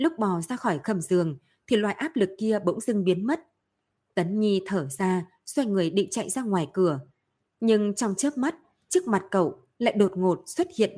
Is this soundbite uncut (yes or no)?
yes